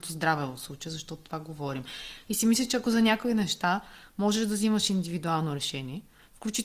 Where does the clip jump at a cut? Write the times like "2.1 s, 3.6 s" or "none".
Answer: none